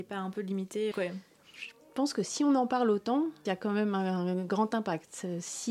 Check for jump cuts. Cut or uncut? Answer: cut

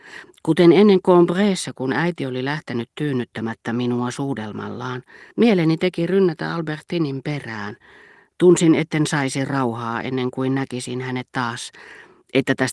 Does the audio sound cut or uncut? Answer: cut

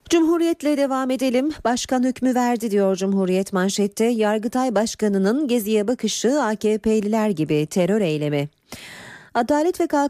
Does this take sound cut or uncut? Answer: uncut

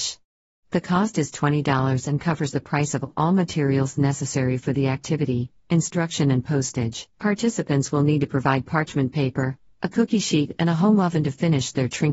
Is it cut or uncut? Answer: cut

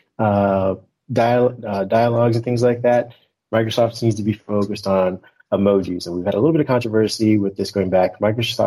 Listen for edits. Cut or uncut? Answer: uncut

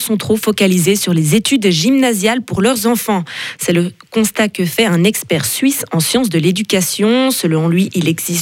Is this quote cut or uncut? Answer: uncut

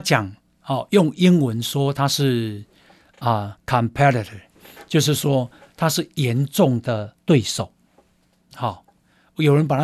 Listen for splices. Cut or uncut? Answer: cut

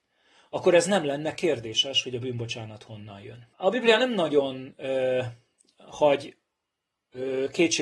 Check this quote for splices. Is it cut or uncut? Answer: cut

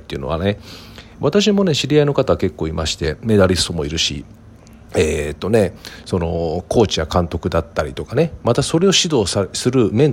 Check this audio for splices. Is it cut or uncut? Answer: uncut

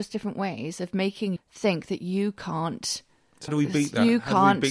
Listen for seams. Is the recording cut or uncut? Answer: cut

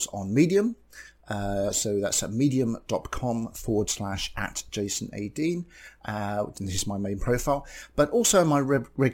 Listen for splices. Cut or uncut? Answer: uncut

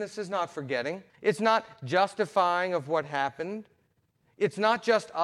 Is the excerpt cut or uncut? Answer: cut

